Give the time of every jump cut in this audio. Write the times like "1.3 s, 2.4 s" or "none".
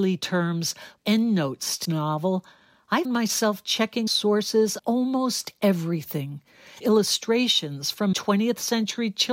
1.0 s, 1.8 s, 3.0 s, 4.1 s, 4.8 s, 6.8 s, 8.1 s